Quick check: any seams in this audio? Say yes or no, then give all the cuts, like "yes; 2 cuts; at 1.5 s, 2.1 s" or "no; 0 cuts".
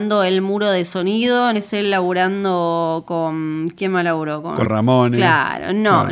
yes; 2 cuts; at 1.5 s, 4.6 s